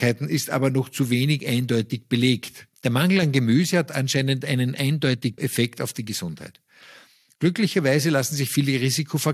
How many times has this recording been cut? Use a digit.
2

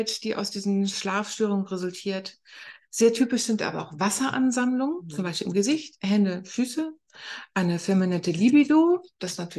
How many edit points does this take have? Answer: 0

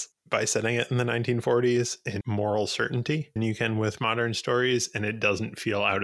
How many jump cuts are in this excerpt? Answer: 3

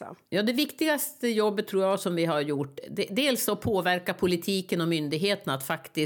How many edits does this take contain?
0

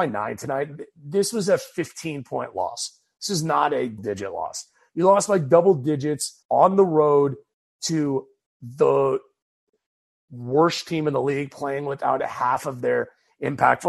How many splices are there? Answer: 2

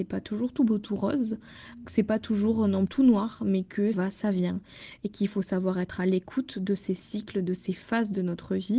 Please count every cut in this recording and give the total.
3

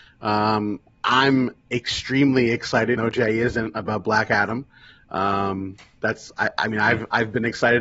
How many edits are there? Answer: 1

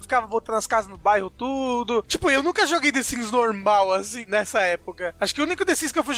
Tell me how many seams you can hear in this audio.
0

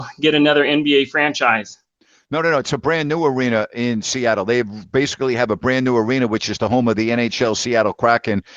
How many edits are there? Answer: 0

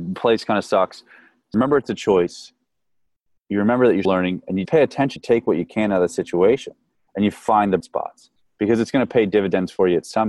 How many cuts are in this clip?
5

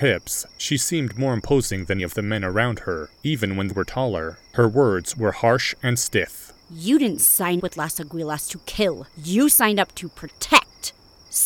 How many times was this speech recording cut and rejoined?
7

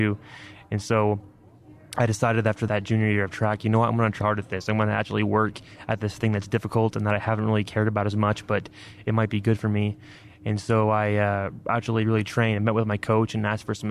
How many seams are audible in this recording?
1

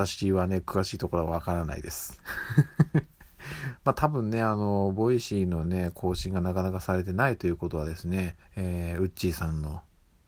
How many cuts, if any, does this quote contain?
1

